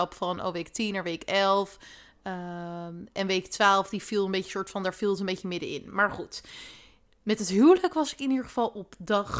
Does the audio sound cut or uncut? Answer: uncut